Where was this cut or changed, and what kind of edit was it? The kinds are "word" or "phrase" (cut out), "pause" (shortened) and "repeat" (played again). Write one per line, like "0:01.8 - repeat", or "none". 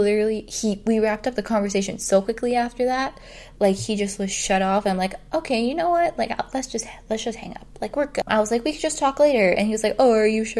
0:08.3 - word